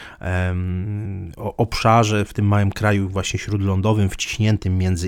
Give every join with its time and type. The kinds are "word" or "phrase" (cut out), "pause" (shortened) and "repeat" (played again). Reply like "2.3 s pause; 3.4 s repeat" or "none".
1.3 s word